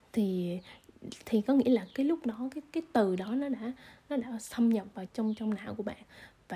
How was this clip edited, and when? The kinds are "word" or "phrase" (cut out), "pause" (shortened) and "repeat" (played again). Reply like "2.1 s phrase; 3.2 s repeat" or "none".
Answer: 5.1 s word

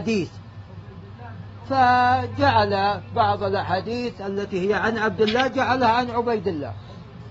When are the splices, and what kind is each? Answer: none

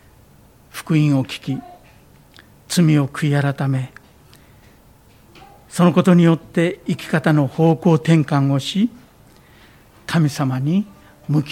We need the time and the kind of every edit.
none

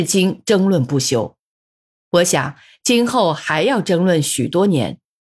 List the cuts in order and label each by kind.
none

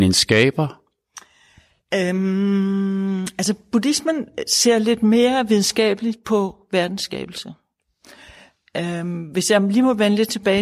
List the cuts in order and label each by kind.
none

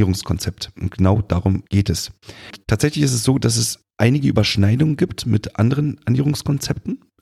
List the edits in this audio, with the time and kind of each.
1.7 s pause; 3.9 s pause

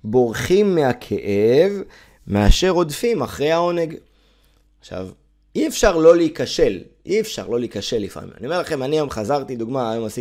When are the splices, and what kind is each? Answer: none

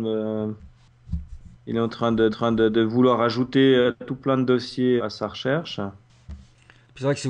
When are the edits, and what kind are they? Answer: 2.3 s repeat; 5.0 s word

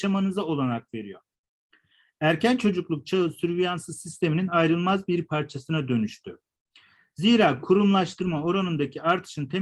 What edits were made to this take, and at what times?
none

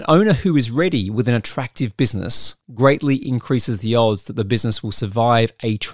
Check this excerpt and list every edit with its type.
2.6 s pause

